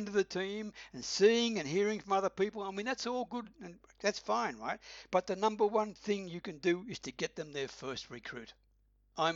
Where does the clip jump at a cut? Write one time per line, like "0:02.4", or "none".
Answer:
none